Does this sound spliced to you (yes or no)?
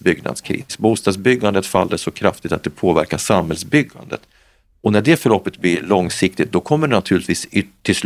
no